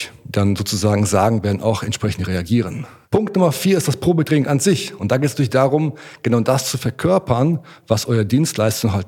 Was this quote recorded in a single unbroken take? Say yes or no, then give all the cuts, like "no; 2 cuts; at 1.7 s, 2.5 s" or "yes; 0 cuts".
yes; 0 cuts